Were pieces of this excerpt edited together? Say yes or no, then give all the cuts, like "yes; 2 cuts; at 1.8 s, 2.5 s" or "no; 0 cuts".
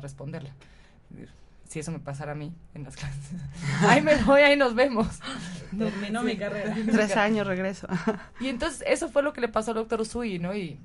no; 0 cuts